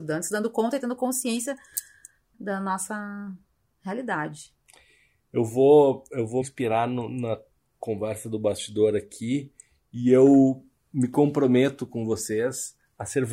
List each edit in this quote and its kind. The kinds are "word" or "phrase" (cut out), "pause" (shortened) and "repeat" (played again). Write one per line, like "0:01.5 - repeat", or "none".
0:02.3 - word
0:06.4 - word